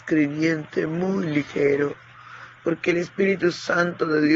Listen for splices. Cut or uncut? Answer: uncut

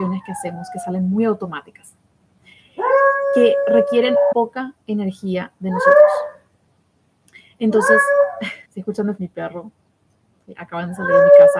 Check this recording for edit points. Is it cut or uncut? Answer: cut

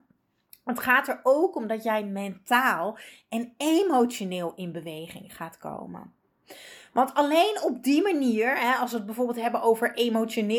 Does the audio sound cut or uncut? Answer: uncut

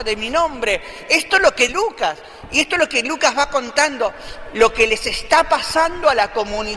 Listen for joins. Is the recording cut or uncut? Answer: cut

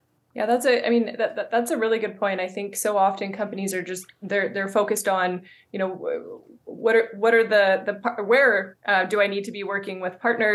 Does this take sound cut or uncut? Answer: uncut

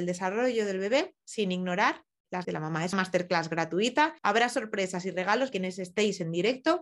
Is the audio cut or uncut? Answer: cut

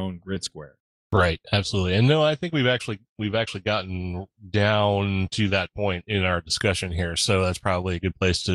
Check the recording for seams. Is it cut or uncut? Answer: uncut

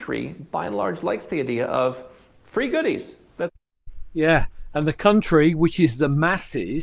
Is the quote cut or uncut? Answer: uncut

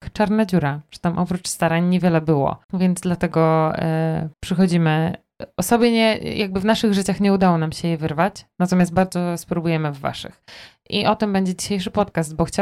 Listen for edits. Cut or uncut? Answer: cut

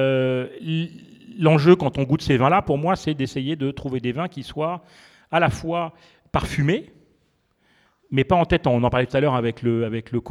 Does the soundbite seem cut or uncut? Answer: uncut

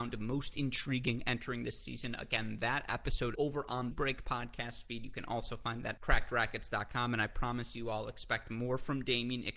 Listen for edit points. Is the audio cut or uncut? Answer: cut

